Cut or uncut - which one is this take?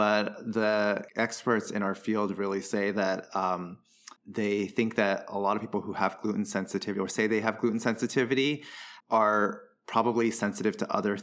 cut